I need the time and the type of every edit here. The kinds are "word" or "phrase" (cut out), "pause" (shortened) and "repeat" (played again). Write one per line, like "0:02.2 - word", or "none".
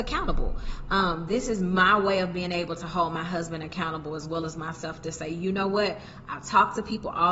none